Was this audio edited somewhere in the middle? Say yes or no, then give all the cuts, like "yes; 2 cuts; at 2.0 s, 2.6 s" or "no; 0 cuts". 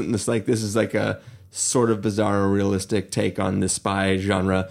no; 0 cuts